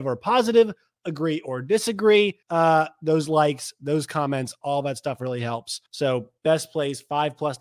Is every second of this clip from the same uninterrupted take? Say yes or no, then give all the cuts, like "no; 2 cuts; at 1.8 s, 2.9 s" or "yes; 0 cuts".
no; 2 cuts; at 2.4 s, 5.9 s